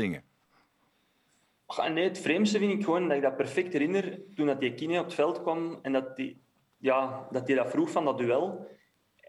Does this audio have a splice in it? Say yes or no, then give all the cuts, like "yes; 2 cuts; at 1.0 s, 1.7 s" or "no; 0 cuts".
no; 0 cuts